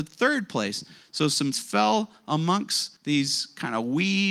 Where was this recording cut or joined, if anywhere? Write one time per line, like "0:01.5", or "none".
0:01.5
0:03.0